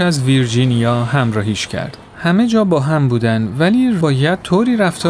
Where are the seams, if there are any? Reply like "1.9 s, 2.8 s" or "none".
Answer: 2.1 s, 4.0 s